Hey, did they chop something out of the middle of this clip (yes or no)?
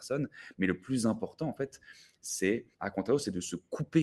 yes